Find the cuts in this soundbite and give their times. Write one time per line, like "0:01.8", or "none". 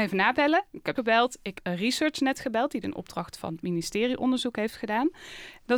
0:00.9
0:01.5
0:02.8